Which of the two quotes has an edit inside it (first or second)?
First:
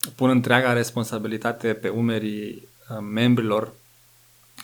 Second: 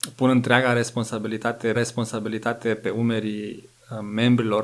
second